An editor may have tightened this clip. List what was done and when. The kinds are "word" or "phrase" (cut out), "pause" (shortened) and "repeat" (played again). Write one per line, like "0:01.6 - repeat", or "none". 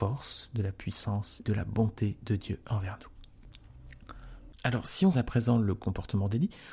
0:01.4 - word
0:05.1 - word